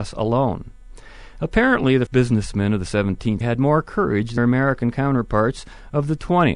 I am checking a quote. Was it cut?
yes; 3 cuts; at 2.1 s, 3.4 s, 4.4 s

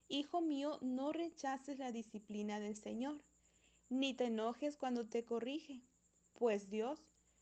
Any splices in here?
no; 0 cuts

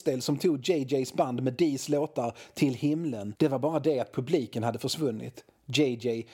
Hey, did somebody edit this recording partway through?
no; 0 cuts

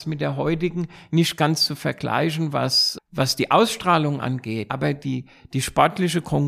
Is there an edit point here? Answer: yes; 2 cuts; at 3.0 s, 4.7 s

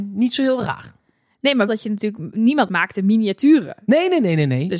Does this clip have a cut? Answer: yes; 2 cuts; at 1.7 s, 2.7 s

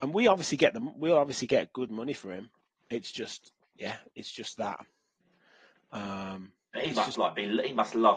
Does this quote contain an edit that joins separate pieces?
no; 0 cuts

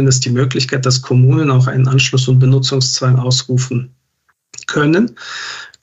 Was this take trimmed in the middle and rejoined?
no; 0 cuts

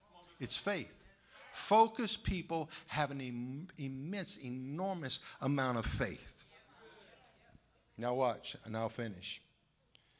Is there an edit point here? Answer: no; 0 cuts

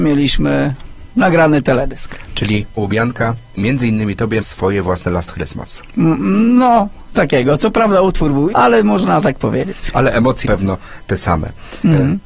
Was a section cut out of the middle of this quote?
yes; 6 cuts; at 2.8 s, 3.6 s, 4.4 s, 7.1 s, 8.5 s, 10.4 s

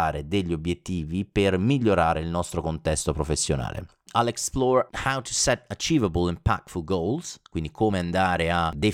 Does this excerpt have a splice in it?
no; 0 cuts

